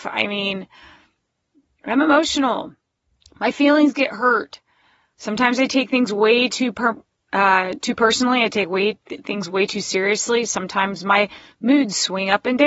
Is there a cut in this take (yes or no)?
no